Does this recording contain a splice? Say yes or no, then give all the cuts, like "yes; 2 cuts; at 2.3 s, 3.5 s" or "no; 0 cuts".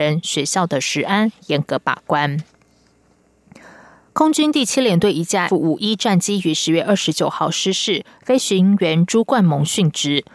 yes; 1 cut; at 5.5 s